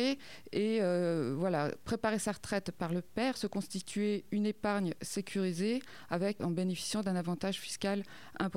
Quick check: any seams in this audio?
yes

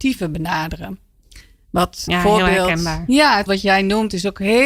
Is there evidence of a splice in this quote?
yes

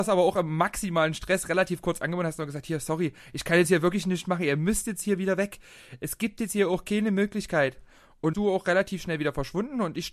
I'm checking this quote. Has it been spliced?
yes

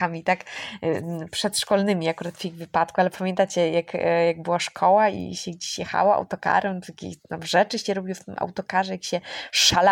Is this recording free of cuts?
yes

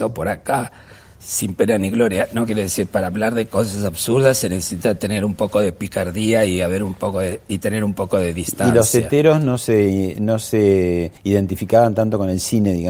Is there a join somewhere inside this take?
yes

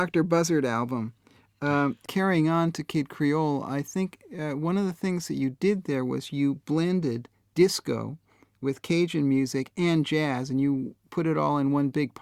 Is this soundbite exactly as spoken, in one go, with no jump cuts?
yes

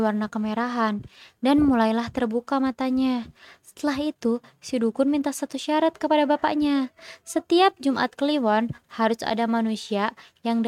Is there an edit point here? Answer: no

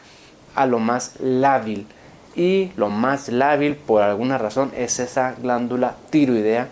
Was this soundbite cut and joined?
no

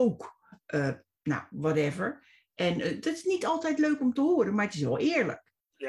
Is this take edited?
no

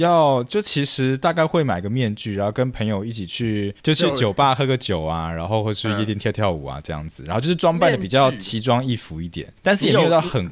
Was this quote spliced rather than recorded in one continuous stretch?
yes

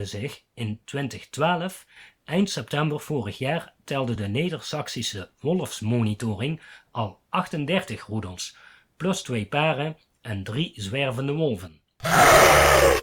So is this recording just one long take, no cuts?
yes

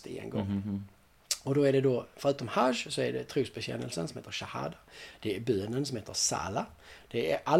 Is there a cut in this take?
no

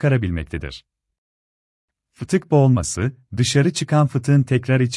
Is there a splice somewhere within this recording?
no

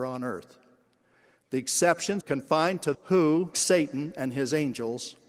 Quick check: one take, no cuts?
no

